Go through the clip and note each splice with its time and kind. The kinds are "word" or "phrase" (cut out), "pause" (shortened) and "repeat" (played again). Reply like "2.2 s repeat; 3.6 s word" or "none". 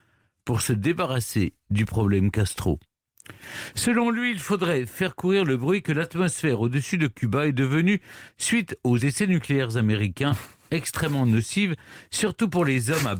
none